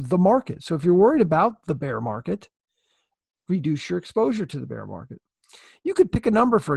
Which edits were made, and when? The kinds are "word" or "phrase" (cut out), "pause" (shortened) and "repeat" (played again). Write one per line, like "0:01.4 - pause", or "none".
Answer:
none